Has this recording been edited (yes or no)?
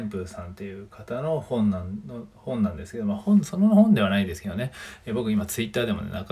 no